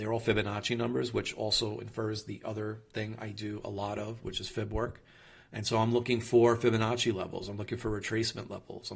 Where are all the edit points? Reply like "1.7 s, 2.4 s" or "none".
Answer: none